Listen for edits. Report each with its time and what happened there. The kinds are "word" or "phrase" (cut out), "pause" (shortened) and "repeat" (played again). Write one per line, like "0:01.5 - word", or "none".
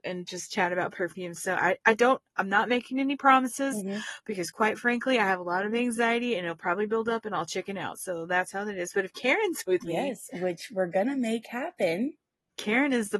none